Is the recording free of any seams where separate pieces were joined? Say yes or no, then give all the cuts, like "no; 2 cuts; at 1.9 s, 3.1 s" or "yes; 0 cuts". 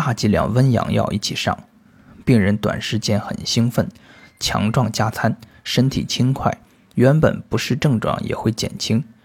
yes; 0 cuts